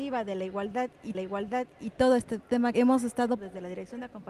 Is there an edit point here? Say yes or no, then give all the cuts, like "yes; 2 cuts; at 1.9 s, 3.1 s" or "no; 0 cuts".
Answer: yes; 3 cuts; at 1.1 s, 2.7 s, 3.4 s